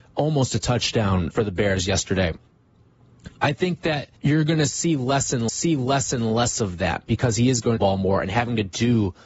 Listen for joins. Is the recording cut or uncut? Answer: cut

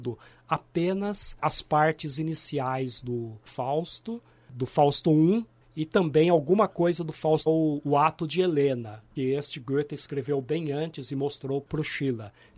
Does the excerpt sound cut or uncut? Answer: cut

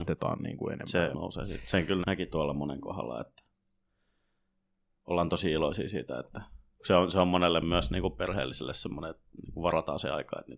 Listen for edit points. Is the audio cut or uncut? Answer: cut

